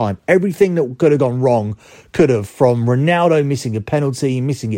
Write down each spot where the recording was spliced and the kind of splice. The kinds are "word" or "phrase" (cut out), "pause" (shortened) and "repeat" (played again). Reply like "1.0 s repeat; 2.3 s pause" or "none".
none